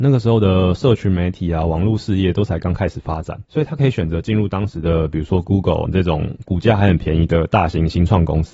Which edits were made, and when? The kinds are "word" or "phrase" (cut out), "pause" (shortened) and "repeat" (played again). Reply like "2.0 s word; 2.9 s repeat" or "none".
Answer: 3.4 s pause; 5.9 s word